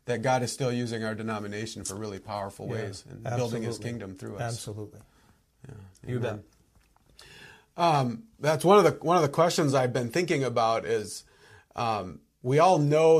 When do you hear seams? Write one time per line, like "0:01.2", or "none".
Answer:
none